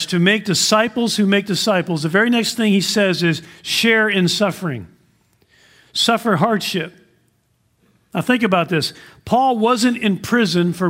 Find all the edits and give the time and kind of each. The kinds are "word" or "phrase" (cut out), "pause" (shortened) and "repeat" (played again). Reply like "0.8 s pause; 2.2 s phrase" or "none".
none